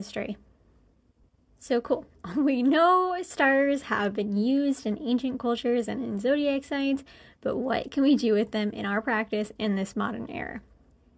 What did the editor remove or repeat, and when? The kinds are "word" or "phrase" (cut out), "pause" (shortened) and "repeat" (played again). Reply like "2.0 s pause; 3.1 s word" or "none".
none